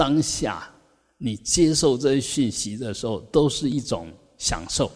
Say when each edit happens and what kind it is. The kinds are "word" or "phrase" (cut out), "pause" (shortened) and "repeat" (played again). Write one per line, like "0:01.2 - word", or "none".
none